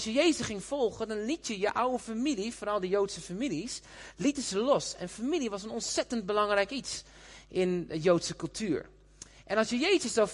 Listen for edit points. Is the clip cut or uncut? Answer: uncut